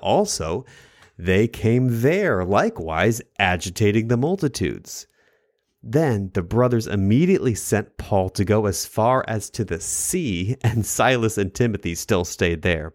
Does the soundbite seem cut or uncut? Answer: uncut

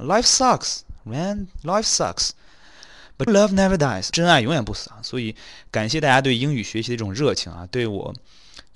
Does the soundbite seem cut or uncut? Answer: cut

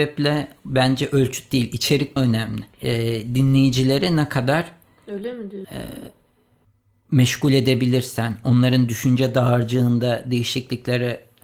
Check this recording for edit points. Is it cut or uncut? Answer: cut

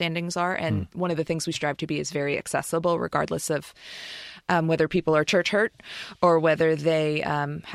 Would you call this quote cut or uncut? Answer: uncut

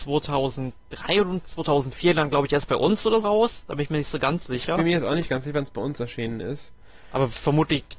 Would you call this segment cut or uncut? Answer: cut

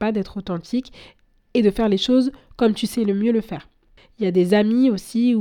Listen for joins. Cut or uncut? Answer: uncut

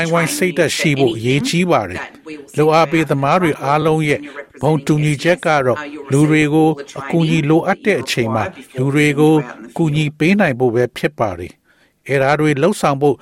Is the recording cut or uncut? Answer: uncut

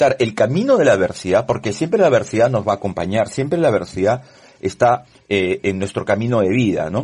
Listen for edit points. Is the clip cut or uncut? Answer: uncut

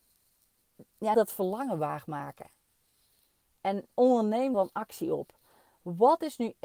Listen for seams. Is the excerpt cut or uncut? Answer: cut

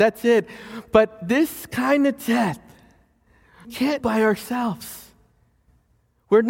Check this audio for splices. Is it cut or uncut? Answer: cut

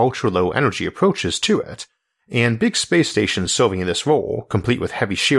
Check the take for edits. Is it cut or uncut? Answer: uncut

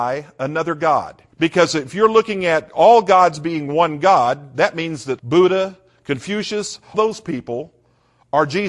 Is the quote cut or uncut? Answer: cut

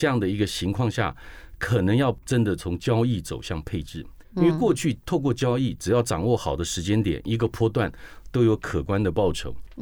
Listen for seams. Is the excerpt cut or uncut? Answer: cut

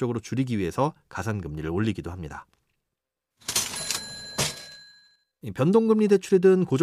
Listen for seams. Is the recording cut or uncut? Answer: uncut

